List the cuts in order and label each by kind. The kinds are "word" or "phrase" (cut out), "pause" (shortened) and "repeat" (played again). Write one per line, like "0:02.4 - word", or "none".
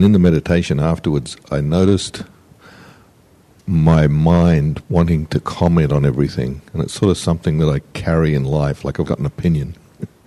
0:06.7 - pause
0:09.1 - word